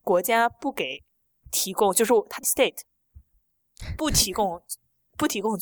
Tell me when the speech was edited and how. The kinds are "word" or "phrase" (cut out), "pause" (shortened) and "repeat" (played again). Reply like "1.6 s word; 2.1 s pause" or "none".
2.4 s word